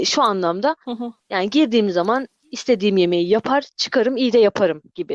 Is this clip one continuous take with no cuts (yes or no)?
no